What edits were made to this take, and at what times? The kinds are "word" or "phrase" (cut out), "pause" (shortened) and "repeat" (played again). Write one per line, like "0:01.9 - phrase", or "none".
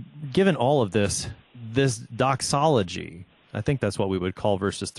0:01.4 - pause